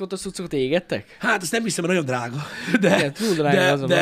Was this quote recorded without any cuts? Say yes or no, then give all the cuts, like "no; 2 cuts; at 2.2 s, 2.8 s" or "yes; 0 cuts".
yes; 0 cuts